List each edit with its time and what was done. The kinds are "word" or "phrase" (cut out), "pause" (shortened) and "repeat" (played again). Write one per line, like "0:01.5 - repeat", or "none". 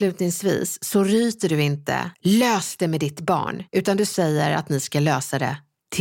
0:02.1 - pause
0:03.7 - pause